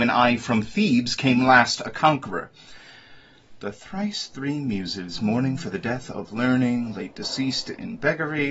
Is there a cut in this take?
no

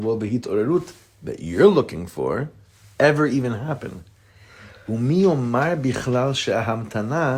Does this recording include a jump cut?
no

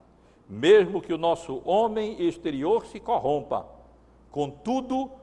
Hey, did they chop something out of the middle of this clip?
no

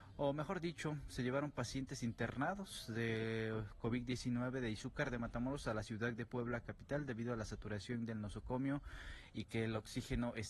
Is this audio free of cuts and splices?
yes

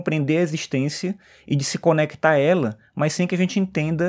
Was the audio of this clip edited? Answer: no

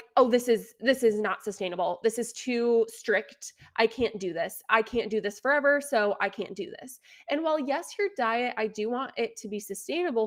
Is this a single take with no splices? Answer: yes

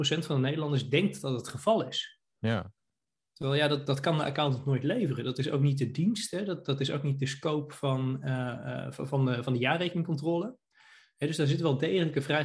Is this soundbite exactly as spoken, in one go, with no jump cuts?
no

